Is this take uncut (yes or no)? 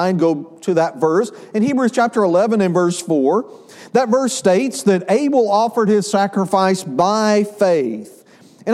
yes